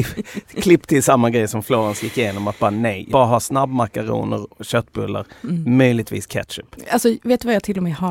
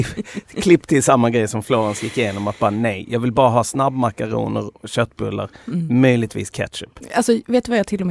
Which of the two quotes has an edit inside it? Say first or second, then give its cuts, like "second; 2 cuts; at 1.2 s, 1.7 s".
first; 1 cut; at 3.1 s